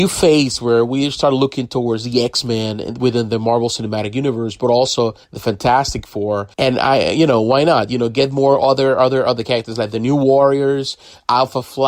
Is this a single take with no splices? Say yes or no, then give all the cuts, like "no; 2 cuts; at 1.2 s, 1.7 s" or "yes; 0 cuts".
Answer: no; 2 cuts; at 5.2 s, 6.5 s